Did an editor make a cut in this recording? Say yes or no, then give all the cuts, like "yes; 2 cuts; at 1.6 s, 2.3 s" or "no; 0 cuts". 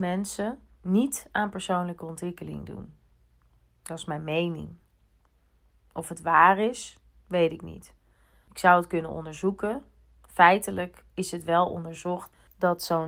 no; 0 cuts